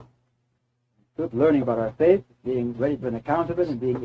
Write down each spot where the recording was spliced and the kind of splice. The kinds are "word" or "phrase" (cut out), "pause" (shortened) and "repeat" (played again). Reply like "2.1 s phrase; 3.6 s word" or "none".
1.3 s word; 1.6 s word; 3.0 s word